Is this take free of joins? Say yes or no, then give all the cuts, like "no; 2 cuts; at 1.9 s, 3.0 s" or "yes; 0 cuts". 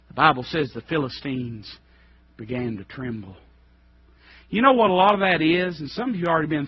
yes; 0 cuts